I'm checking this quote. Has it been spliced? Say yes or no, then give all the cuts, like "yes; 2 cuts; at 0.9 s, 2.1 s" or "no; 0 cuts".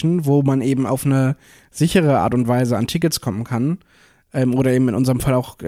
no; 0 cuts